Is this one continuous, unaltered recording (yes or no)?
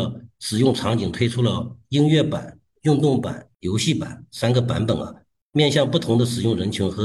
yes